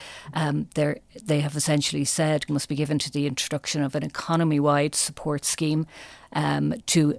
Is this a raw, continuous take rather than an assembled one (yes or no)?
no